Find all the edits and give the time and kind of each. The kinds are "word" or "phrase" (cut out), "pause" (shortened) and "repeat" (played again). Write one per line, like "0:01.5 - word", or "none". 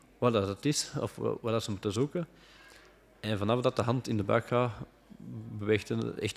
none

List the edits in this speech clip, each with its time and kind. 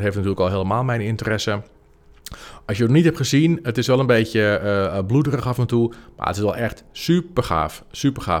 none

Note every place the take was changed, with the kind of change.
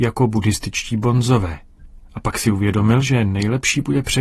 none

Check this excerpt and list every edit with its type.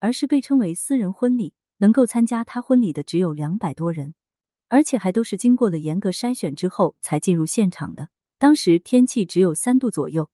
none

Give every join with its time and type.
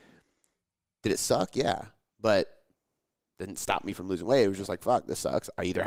none

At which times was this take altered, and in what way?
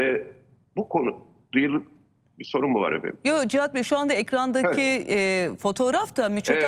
none

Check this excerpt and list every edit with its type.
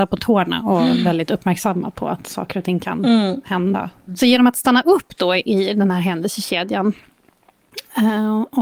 none

